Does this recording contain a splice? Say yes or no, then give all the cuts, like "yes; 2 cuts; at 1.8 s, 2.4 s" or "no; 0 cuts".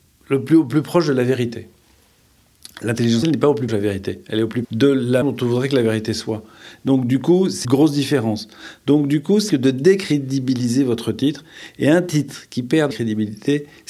yes; 7 cuts; at 3.2 s, 3.7 s, 4.6 s, 5.2 s, 7.6 s, 9.5 s, 12.9 s